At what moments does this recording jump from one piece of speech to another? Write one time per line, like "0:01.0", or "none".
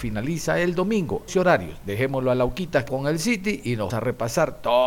0:01.3
0:02.9
0:03.9